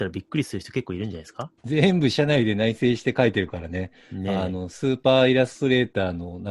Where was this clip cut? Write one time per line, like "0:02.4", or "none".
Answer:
0:01.6